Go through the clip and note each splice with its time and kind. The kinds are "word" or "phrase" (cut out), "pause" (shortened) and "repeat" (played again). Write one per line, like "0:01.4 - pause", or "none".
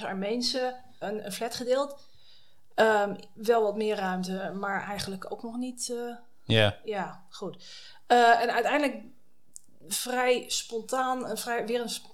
0:01.0 - word

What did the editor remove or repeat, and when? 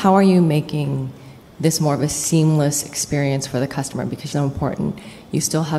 0:04.3 - phrase

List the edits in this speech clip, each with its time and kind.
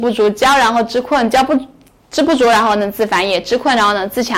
none

